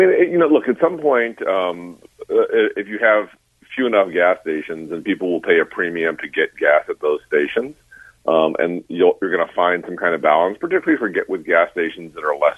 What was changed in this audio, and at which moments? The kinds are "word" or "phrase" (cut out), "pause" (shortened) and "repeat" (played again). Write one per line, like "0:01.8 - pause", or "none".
none